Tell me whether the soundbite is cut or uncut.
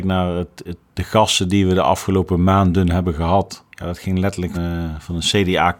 cut